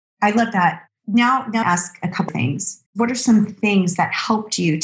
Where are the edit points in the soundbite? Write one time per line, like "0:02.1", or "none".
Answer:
0:01.6
0:02.3
0:02.9